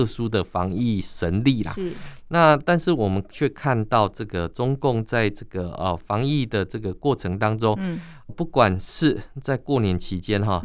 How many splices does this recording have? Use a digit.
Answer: 1